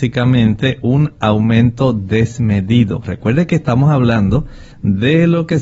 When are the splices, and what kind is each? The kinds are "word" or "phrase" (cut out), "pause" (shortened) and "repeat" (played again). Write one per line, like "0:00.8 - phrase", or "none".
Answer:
0:04.7 - pause